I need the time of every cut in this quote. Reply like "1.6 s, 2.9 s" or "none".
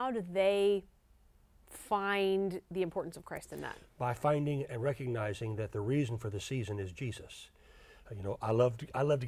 none